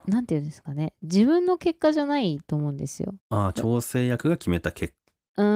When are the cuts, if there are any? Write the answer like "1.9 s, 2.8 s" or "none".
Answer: 3.2 s